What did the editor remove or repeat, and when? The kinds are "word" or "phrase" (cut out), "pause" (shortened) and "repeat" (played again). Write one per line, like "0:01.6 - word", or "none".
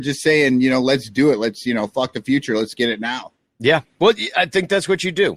none